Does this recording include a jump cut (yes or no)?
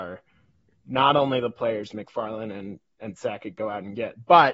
no